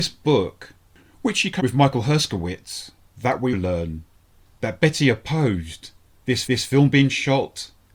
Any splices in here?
yes; 3 cuts; at 1.6 s, 3.5 s, 6.5 s

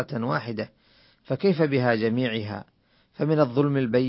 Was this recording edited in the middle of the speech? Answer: no; 0 cuts

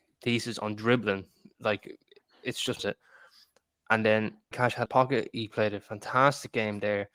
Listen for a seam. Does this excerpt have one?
yes; 3 cuts; at 2.8 s, 4.5 s, 4.9 s

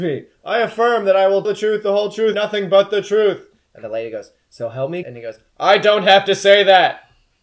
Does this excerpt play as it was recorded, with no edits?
no; 3 cuts; at 1.4 s, 2.3 s, 5.0 s

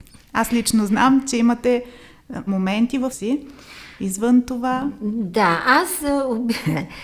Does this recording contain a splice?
yes; 2 cuts; at 2.5 s, 3.1 s

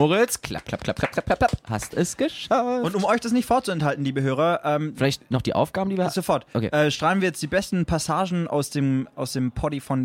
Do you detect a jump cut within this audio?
no; 0 cuts

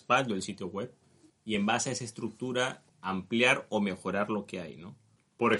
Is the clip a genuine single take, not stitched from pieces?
yes; 0 cuts

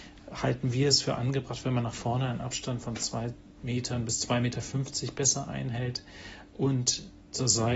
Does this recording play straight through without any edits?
yes; 0 cuts

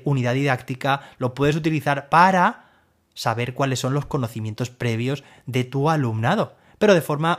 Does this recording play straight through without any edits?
yes; 0 cuts

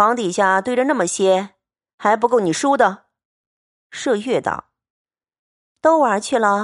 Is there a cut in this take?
no; 0 cuts

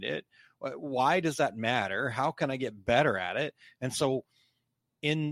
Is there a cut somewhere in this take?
no; 0 cuts

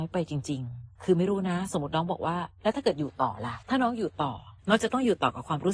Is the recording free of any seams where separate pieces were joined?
no; 3 cuts; at 0.9 s, 3.6 s, 4.6 s

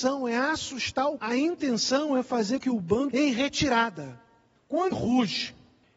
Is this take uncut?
no; 4 cuts; at 1.2 s, 2.6 s, 3.1 s, 4.9 s

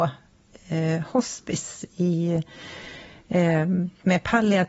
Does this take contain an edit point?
no; 0 cuts

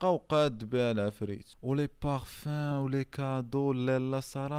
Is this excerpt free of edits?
yes; 0 cuts

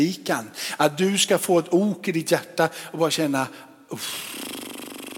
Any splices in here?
no; 0 cuts

